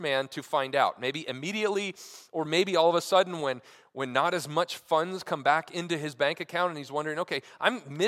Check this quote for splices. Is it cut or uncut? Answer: uncut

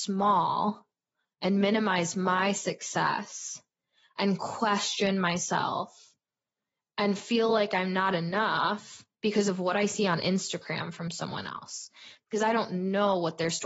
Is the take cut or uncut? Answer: uncut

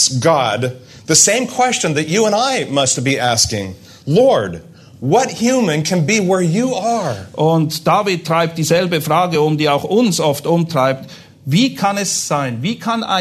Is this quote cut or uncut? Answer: uncut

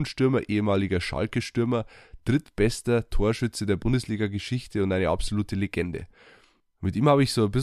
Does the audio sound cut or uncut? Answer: uncut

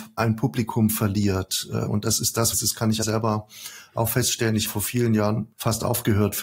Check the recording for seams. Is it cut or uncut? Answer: cut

